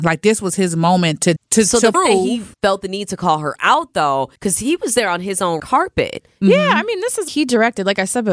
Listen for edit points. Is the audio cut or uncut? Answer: cut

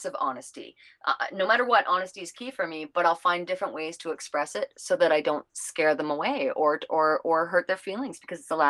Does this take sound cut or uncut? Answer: uncut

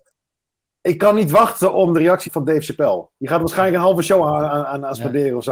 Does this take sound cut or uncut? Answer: cut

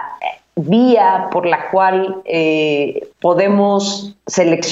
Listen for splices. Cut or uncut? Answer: cut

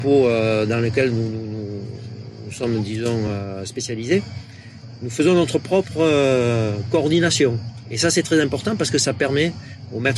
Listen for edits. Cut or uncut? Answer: uncut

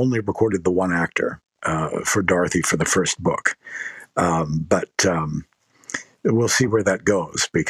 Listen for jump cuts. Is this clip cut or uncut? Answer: uncut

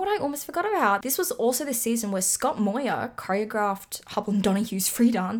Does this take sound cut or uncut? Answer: uncut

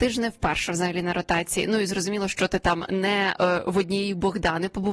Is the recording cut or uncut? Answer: uncut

